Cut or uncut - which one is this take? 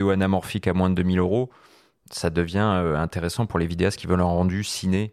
uncut